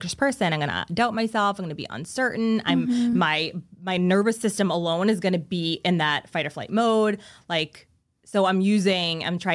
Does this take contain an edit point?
no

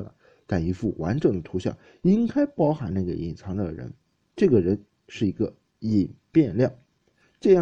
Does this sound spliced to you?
no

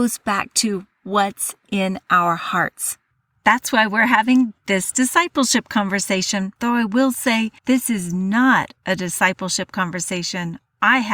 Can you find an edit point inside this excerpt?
yes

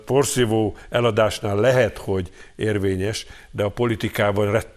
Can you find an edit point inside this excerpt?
no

